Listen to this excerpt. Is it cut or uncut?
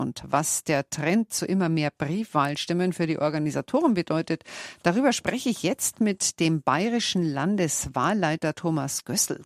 uncut